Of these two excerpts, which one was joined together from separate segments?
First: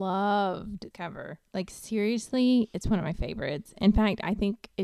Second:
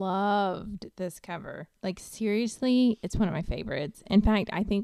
first; 1 cut; at 0.9 s

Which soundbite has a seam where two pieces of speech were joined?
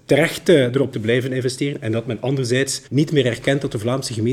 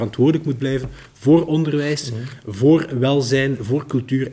first; 2 cuts; at 0.9 s, 2.9 s

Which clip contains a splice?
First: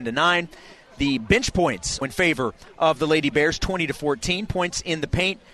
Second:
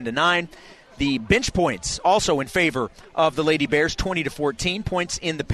first; 1 cut; at 2.0 s

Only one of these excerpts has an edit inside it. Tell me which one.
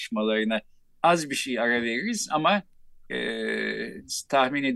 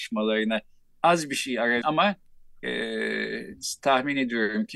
second; 1 cut; at 1.8 s

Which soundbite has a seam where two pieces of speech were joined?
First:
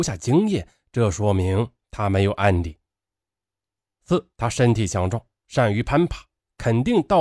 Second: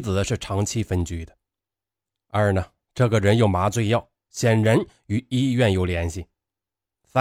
first; 1 cut; at 4.3 s

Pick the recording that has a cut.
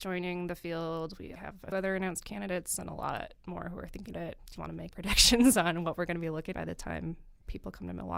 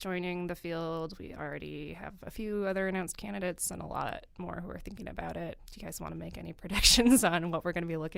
first; 6 cuts; at 1.4 s, 1.7 s, 4.1 s, 4.6 s, 4.9 s, 6.5 s

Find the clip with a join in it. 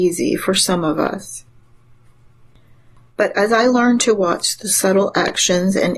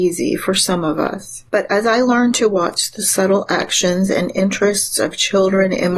second; 1 cut; at 1.5 s

